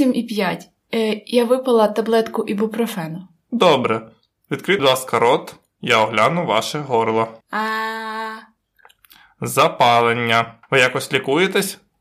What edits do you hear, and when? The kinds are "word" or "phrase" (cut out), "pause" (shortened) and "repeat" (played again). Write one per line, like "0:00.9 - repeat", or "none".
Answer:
0:04.8 - word
0:07.4 - pause
0:10.6 - pause

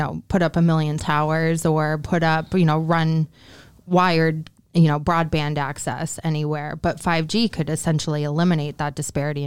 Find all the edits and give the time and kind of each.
0:01.0 - word

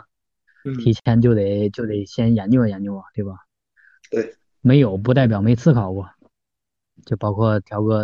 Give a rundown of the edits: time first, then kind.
none

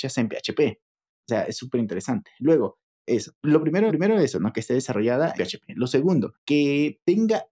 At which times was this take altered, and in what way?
0:03.9 - repeat
0:05.3 - word

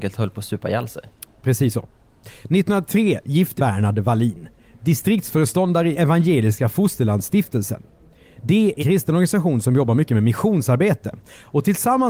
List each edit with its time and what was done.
0:03.6 - phrase
0:05.9 - word
0:08.8 - word

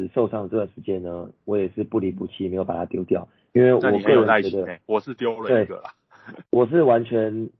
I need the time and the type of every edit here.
0:03.4 - pause
0:06.5 - pause

